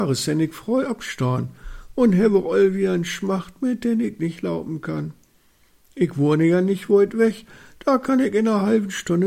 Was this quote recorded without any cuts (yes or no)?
yes